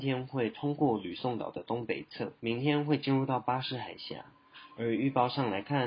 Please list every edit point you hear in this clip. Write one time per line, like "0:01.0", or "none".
0:02.4